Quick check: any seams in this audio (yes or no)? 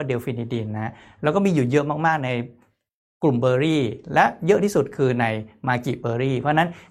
no